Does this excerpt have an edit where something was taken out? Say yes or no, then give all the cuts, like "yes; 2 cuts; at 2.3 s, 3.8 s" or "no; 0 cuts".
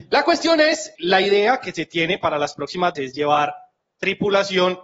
yes; 2 cuts; at 1.0 s, 3.0 s